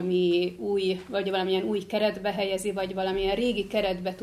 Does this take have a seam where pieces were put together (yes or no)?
no